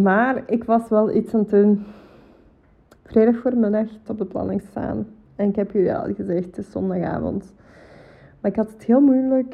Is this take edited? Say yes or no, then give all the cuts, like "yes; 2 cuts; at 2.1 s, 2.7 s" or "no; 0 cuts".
yes; 2 cuts; at 3.0 s, 4.1 s